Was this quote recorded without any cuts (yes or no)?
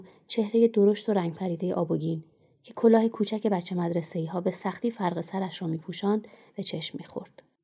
yes